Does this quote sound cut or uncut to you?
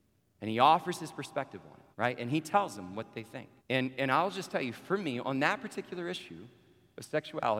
cut